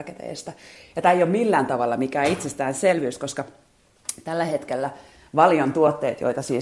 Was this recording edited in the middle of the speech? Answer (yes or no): no